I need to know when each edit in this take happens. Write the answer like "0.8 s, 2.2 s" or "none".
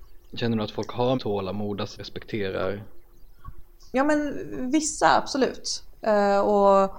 1.1 s, 2.0 s